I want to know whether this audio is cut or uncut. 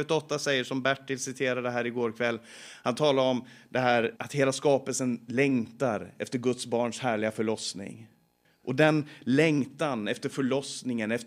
cut